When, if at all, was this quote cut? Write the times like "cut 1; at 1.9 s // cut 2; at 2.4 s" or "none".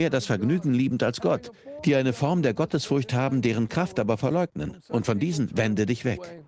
none